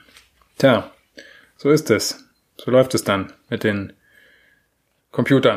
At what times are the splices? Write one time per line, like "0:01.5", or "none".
none